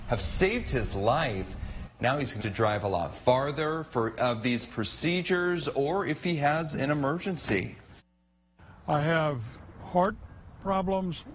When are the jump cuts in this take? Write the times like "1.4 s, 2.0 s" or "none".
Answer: 2.4 s, 4.2 s, 9.8 s